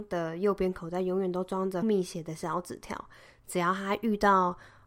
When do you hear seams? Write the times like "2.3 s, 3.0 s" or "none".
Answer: 1.8 s